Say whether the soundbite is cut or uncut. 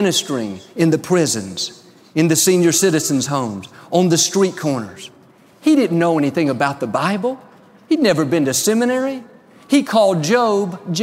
uncut